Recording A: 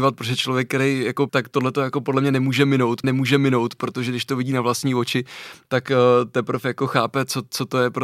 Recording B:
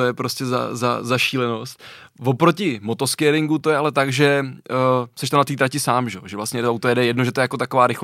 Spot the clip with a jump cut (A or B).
A